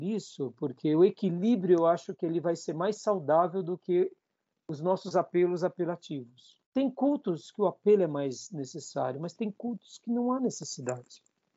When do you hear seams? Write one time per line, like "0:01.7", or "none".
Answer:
0:06.6